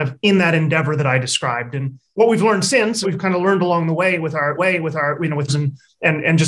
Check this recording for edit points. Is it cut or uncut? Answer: cut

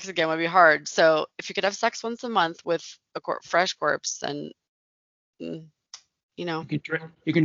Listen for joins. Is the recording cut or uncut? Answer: uncut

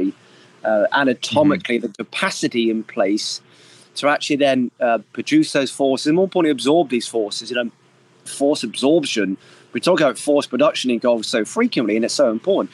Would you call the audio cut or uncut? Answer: uncut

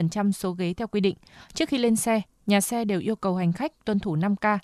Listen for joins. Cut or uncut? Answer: uncut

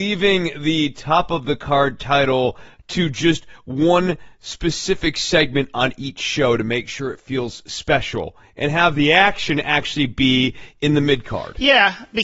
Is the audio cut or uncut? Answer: uncut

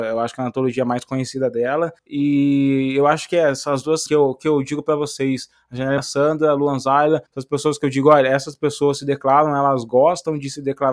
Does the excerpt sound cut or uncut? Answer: cut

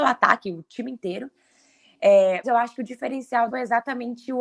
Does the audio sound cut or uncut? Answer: cut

